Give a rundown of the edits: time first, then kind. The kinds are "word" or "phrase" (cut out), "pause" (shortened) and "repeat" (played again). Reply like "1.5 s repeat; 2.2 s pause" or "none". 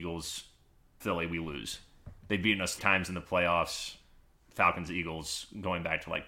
1.0 s word; 2.8 s word